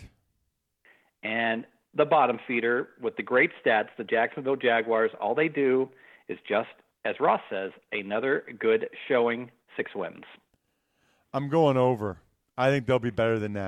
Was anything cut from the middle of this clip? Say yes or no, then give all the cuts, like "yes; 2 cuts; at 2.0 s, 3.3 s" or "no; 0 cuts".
no; 0 cuts